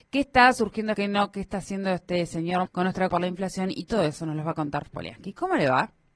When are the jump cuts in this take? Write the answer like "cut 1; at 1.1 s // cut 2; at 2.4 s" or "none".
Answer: cut 1; at 0.9 s // cut 2; at 2.7 s // cut 3; at 3.1 s // cut 4; at 4.9 s